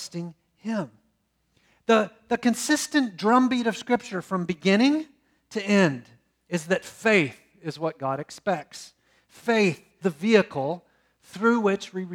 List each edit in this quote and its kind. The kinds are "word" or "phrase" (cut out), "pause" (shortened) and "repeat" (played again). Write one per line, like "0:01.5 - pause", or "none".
0:10.0 - word